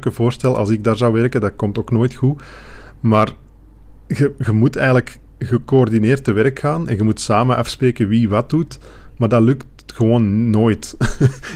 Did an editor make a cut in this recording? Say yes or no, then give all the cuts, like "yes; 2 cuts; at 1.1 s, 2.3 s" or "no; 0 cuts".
no; 0 cuts